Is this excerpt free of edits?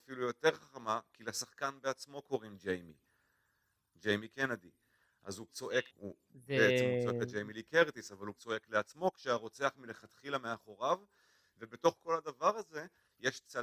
no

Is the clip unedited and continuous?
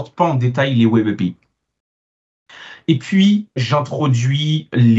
no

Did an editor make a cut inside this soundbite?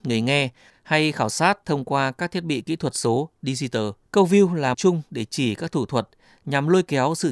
yes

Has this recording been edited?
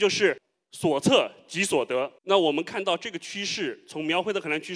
yes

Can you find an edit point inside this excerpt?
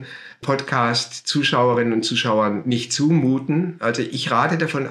no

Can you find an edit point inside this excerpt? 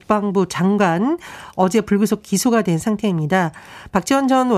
no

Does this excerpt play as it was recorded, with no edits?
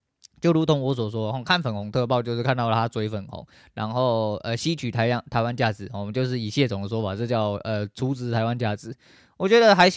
yes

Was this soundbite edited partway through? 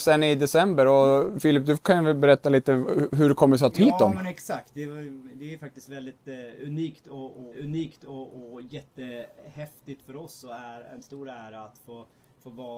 yes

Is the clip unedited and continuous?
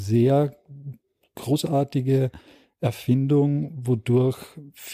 yes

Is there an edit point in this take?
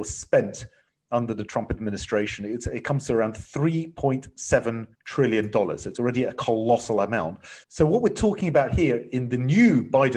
yes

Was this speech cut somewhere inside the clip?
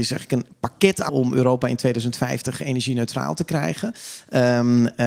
yes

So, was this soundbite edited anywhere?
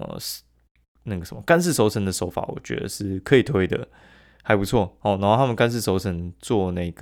no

